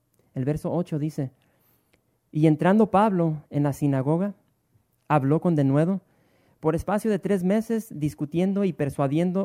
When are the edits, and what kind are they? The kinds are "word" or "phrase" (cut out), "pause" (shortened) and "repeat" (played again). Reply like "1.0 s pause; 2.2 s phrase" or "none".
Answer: none

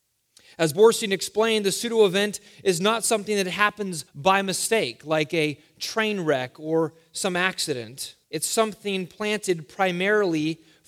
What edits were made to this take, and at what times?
4.1 s pause; 8.2 s pause

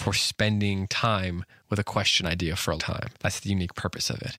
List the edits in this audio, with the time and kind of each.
2.2 s phrase; 2.8 s word; 3.2 s pause

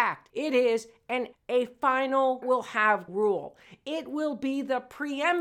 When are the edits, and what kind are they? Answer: 1.3 s word; 2.4 s phrase; 3.1 s word

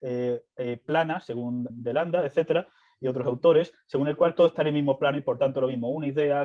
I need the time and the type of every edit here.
1.7 s word

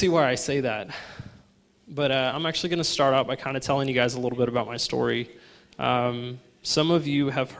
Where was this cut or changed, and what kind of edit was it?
none

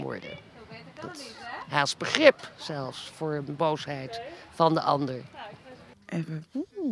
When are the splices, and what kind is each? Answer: none

